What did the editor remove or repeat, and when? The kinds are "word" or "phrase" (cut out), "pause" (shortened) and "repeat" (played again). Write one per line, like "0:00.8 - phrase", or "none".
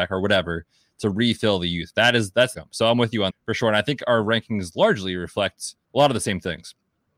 0:02.5 - phrase
0:03.3 - word
0:05.8 - pause